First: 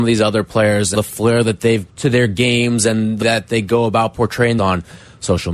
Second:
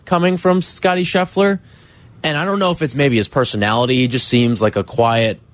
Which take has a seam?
first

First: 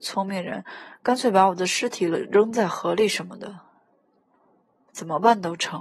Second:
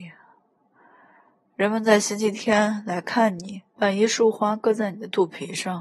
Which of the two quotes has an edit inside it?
second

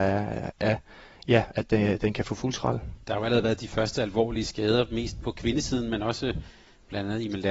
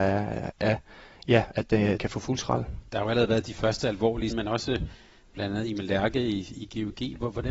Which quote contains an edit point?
second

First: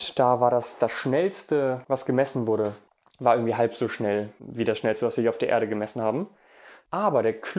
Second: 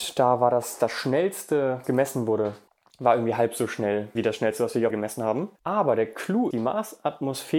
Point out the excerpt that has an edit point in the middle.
second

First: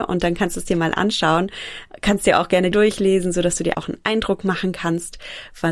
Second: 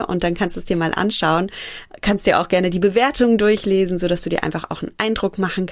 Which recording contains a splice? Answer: first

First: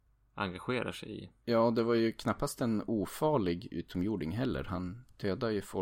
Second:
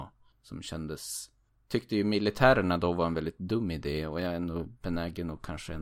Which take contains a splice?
first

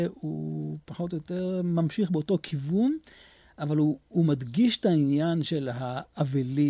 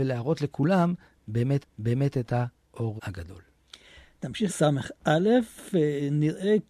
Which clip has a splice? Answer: second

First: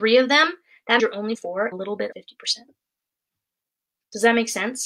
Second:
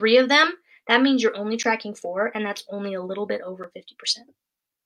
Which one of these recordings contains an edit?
first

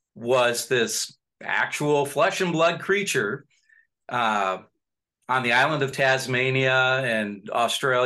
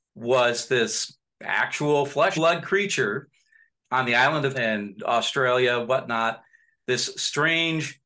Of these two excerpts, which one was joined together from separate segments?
second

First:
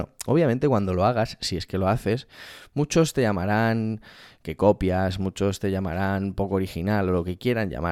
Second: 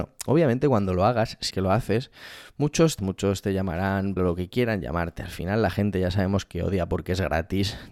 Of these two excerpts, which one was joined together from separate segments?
second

